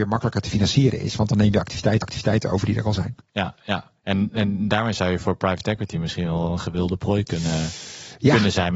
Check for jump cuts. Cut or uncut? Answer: cut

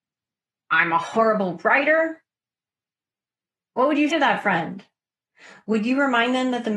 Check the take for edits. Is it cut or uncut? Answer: cut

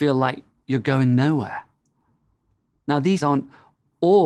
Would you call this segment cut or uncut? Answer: cut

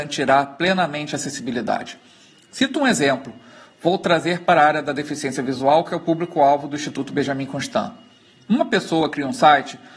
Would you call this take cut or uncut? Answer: uncut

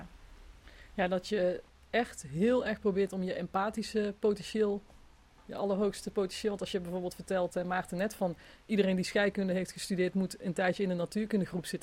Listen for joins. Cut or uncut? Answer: uncut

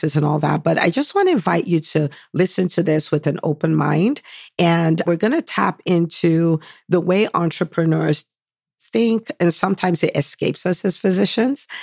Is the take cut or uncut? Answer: cut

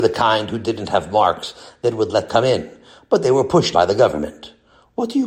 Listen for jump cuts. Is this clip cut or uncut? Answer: cut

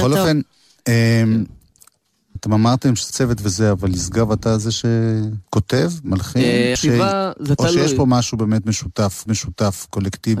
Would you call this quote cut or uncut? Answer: cut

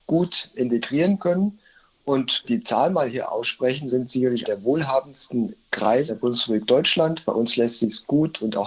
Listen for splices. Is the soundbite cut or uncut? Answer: cut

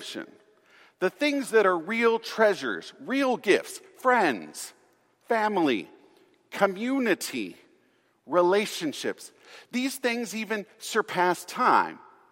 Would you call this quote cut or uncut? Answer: uncut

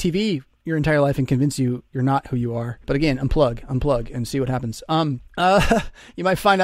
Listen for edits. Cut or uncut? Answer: cut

